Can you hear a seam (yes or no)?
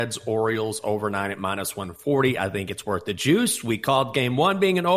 no